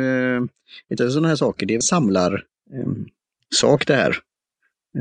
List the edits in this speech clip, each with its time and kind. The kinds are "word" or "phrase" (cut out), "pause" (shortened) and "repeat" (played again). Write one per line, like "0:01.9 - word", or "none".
0:01.0 - word
0:01.8 - word